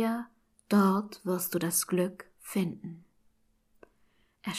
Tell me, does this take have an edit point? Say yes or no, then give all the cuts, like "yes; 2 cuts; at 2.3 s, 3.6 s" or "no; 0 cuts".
no; 0 cuts